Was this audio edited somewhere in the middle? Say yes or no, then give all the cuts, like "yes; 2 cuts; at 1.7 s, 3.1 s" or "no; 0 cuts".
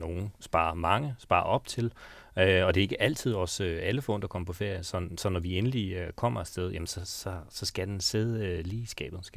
no; 0 cuts